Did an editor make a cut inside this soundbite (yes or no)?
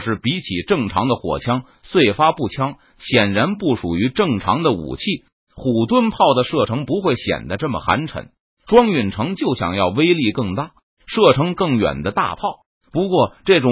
no